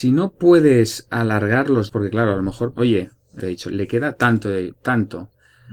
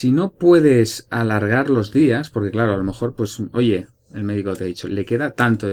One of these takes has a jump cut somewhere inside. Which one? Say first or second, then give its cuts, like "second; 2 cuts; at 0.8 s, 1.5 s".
first; 3 cuts; at 1.9 s, 2.7 s, 3.4 s